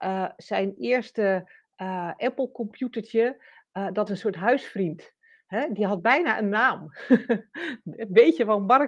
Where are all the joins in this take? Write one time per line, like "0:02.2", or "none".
0:04.1